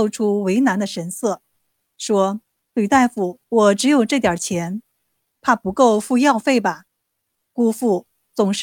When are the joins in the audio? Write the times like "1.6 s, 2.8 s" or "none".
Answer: 2.4 s, 3.4 s, 6.9 s